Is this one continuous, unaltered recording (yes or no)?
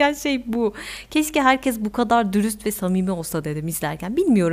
yes